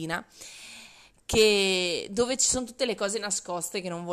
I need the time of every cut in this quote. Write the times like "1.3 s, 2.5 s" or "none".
none